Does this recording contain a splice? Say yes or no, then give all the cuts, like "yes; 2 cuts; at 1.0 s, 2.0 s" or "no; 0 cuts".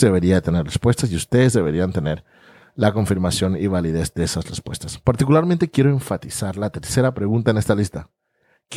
no; 0 cuts